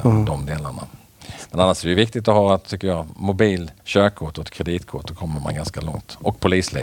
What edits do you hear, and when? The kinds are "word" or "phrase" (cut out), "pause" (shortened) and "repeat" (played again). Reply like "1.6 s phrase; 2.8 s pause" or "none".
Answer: 3.8 s pause